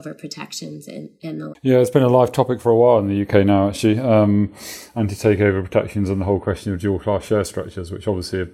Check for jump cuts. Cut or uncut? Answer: cut